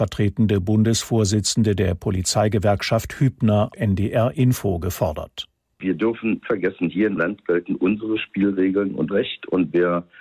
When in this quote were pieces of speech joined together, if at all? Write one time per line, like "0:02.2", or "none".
0:03.7
0:06.4
0:07.2
0:09.1